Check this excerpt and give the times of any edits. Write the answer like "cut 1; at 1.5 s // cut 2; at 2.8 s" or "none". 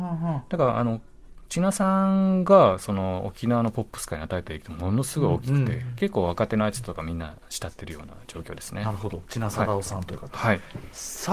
none